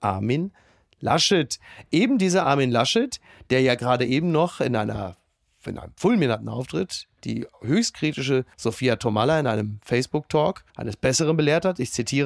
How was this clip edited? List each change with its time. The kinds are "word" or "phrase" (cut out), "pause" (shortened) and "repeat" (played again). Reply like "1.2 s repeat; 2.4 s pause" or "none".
8.5 s pause; 10.7 s pause

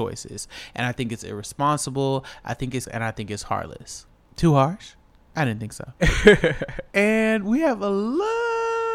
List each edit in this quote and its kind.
2.9 s word

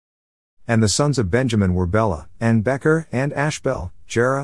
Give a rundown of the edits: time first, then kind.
none

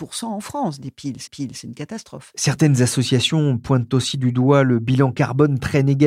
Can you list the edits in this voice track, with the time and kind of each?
1.3 s repeat

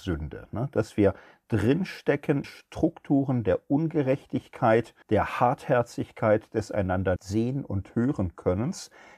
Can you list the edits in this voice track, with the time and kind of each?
2.4 s word; 5.0 s pause; 7.2 s word

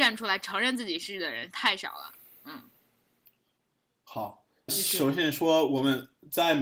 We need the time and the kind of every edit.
4.7 s word

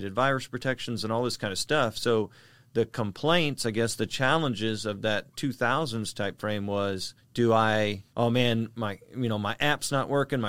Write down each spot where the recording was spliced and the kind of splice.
6.4 s word; 7.2 s pause; 8.1 s pause

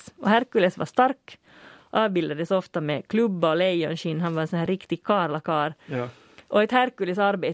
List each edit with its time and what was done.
none

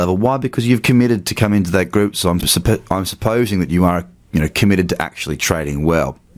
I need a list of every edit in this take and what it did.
2.4 s word

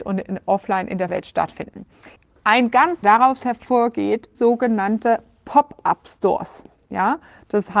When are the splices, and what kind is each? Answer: 1.1 s word; 2.2 s pause; 3.0 s phrase; 4.3 s word

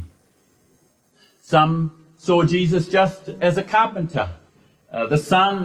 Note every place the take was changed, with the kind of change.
none

